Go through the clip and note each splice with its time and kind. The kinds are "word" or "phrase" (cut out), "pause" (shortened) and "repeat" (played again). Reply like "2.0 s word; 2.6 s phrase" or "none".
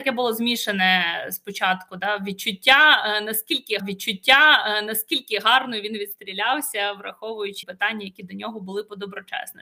3.8 s repeat; 7.6 s word